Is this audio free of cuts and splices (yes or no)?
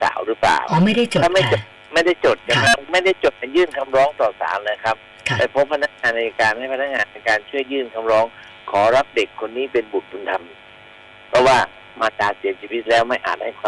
no